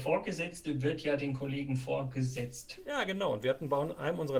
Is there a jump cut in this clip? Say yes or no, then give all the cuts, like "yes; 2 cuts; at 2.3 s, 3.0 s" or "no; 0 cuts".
no; 0 cuts